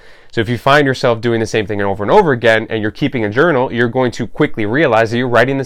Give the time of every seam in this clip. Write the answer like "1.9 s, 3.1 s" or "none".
none